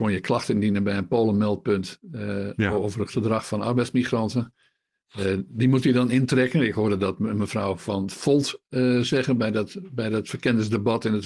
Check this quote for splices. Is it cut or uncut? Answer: uncut